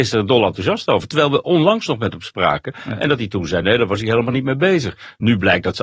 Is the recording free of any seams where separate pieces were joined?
yes; 0 cuts

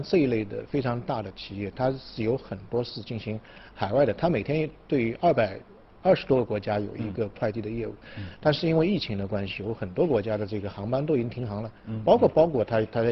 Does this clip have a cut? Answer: no; 0 cuts

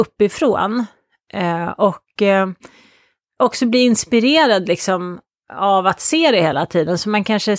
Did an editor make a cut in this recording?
no; 0 cuts

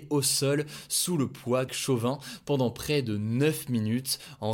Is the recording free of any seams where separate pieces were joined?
no; 1 cut; at 1.7 s

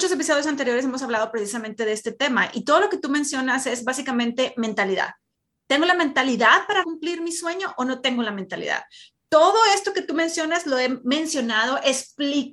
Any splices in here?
yes; 1 cut; at 6.8 s

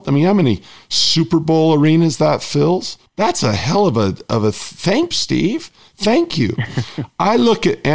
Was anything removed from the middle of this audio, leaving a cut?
yes; 2 cuts; at 3.1 s, 5.1 s

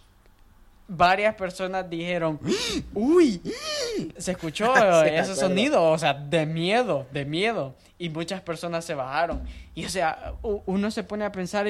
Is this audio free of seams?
no; 1 cut; at 4.2 s

